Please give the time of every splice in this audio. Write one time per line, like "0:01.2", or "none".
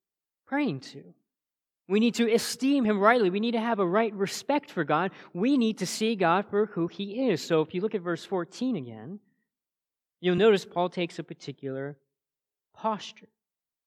none

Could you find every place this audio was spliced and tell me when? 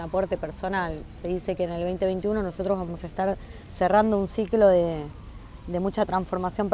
none

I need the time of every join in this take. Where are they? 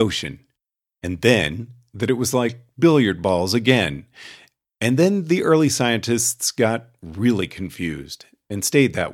none

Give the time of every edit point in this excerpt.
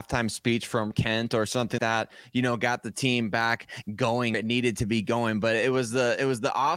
0:00.9
0:01.8
0:04.3

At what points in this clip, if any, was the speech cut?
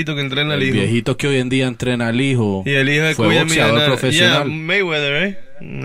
none

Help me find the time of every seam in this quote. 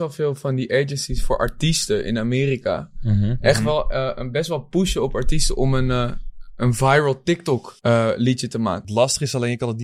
0:07.8

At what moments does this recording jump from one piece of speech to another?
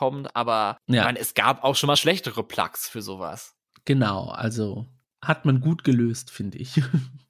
none

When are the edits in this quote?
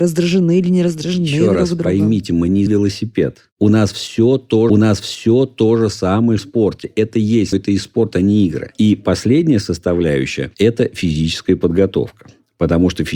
0:02.7
0:04.7
0:06.4
0:07.5

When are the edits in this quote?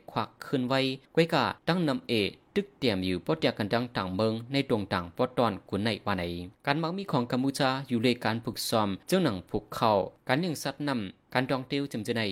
0:01.0
0:01.6
0:06.5
0:09.0

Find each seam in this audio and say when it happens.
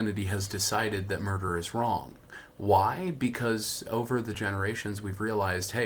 none

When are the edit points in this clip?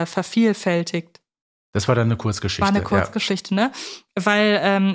0:01.4

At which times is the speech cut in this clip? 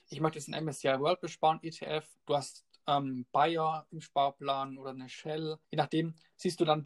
0:02.2
0:05.6

